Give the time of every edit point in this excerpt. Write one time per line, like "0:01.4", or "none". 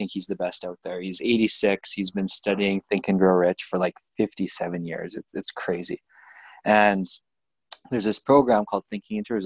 none